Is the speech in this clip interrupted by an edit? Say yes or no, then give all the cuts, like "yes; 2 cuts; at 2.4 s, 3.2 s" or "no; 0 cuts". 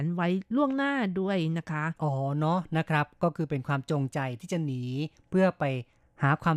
yes; 1 cut; at 2.0 s